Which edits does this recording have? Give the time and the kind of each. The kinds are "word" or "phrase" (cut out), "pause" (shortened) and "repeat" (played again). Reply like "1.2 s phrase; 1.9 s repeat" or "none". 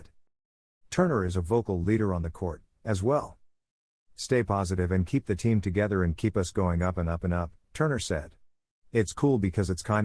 none